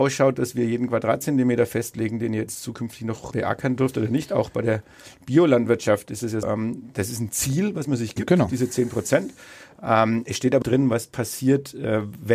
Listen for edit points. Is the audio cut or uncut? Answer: cut